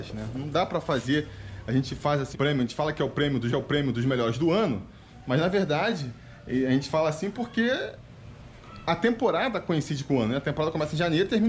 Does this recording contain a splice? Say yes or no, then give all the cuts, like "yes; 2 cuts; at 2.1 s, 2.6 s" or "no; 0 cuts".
yes; 2 cuts; at 2.3 s, 3.5 s